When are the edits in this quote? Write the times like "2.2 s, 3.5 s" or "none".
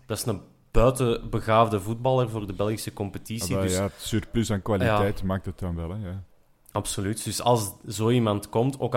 none